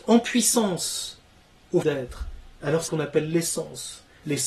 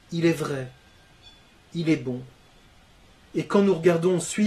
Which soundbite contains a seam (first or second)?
first